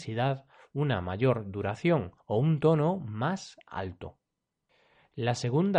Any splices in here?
yes; 1 cut; at 2.2 s

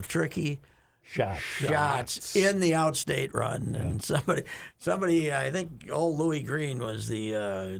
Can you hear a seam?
no; 0 cuts

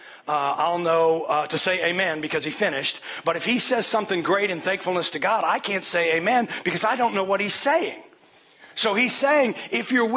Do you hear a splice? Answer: no; 0 cuts

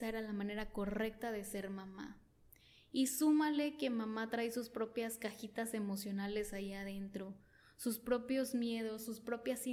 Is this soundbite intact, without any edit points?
yes; 0 cuts

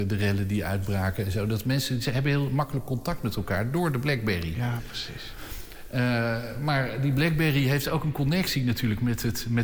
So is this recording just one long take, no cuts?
yes; 0 cuts

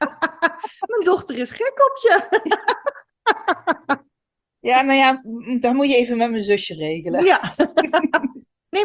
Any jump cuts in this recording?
no; 0 cuts

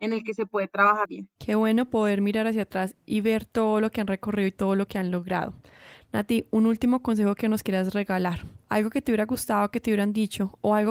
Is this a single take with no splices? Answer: no; 2 cuts; at 1.0 s, 1.4 s

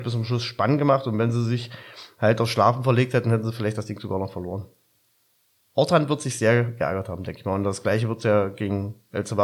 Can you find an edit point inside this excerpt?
no; 0 cuts

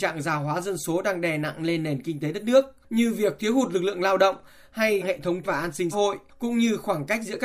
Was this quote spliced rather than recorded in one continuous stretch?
yes; 3 cuts; at 5.0 s, 5.4 s, 5.9 s

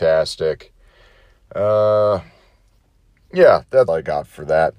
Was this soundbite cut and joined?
yes; 1 cut; at 3.9 s

